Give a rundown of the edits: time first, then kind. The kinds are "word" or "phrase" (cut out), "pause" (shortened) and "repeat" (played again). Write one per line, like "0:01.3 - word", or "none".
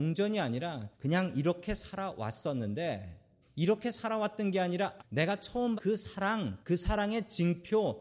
0:00.9 - pause
0:03.4 - pause
0:05.0 - word
0:05.8 - word
0:06.6 - pause